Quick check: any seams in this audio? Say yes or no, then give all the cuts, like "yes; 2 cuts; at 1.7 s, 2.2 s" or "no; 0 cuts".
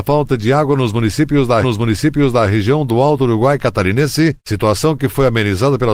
yes; 1 cut; at 1.6 s